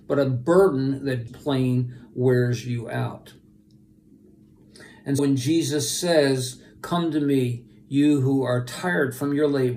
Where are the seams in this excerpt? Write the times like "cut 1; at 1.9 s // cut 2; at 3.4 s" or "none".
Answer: cut 1; at 1.3 s // cut 2; at 5.2 s